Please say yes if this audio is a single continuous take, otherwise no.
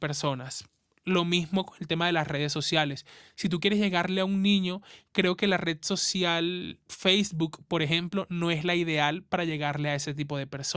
yes